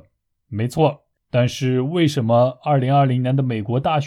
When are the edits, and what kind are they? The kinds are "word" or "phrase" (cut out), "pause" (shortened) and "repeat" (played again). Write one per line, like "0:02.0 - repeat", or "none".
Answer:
0:01.2 - pause